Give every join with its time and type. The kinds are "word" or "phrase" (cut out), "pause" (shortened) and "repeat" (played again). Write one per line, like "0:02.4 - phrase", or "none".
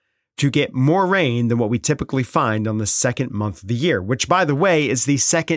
none